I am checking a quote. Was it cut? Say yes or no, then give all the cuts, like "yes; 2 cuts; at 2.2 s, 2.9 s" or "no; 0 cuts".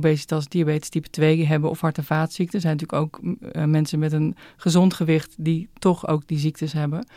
no; 0 cuts